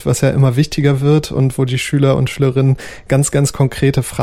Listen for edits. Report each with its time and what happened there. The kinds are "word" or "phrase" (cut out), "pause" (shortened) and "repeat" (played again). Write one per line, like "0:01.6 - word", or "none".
none